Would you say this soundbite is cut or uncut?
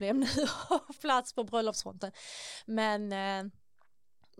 cut